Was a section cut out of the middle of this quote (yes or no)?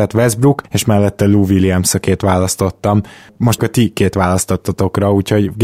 yes